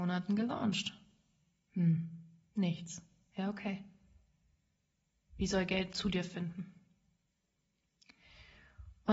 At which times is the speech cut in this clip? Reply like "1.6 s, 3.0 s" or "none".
none